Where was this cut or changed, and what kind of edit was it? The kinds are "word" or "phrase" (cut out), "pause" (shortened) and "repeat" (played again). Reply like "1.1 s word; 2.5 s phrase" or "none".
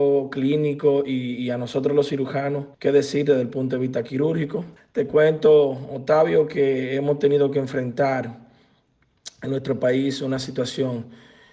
2.7 s pause; 4.8 s pause